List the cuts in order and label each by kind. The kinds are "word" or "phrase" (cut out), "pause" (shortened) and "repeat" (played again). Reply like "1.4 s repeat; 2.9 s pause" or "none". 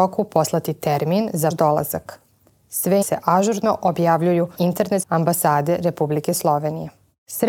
1.5 s word; 3.0 s word; 4.5 s word; 5.0 s word